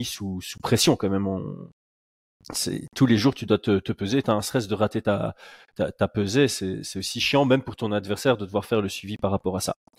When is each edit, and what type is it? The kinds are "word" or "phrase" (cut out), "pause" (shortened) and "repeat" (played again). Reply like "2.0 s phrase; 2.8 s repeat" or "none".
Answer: 4.2 s phrase

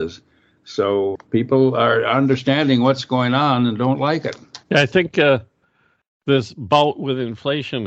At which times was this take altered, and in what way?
1.2 s word; 4.6 s pause

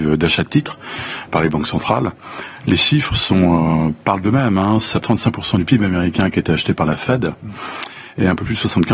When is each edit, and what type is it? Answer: 1.3 s word; 5.0 s word

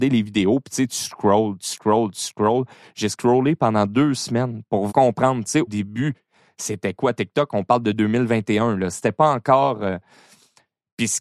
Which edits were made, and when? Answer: 4.9 s word; 5.7 s word

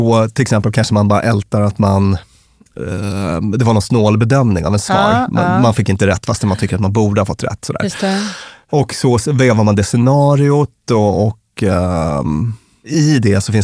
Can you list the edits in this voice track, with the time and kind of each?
none

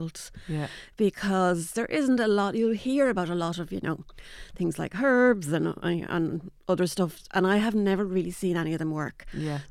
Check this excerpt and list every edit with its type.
7.3 s pause

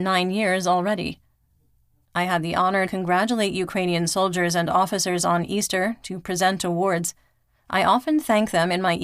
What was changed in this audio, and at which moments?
2.9 s word

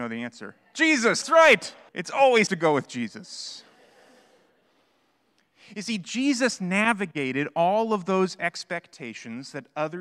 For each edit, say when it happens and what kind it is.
1.2 s word; 1.9 s pause; 2.5 s word

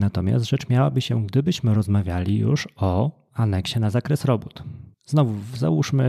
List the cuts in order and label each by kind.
4.9 s pause

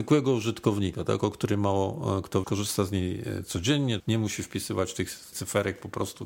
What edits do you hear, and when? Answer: 2.4 s phrase; 4.0 s word; 5.3 s word

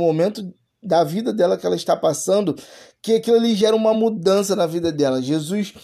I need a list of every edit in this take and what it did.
none

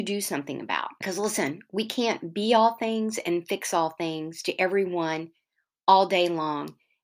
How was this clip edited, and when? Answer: 1.0 s pause

